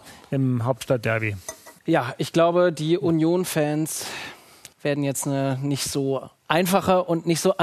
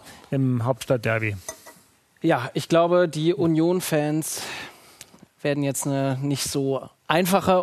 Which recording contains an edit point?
first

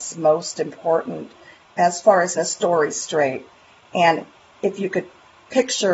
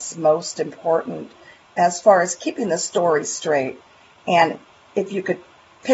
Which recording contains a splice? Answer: first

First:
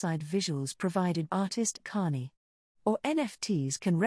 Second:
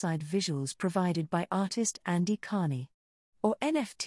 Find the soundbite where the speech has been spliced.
first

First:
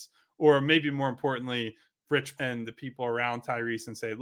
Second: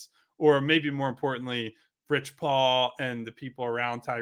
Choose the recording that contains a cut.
first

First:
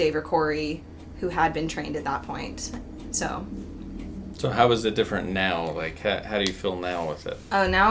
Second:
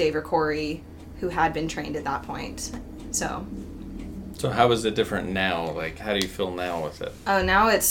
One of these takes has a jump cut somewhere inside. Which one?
second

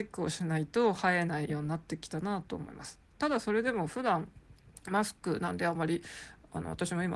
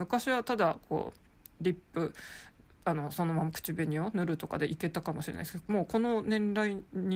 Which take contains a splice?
second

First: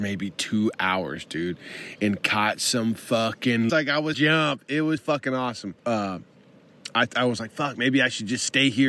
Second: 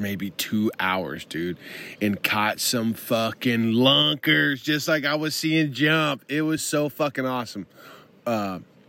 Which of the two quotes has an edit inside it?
first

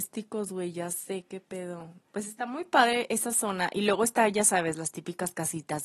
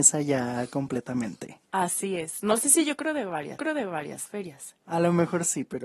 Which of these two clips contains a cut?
second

